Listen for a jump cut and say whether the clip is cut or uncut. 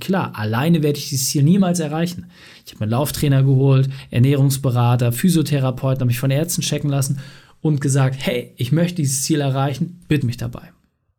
cut